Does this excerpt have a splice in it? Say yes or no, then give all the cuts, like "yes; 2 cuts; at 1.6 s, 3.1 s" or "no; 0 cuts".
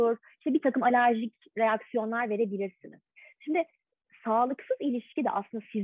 no; 0 cuts